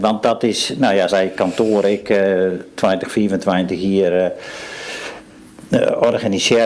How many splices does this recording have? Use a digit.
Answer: 1